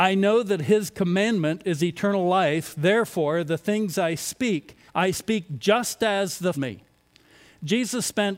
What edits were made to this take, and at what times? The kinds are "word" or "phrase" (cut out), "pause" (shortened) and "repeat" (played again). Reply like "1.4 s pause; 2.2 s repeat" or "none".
4.9 s pause; 6.5 s phrase